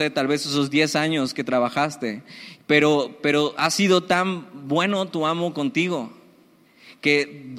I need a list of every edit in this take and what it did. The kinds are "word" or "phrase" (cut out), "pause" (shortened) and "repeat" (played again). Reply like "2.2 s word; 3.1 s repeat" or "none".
none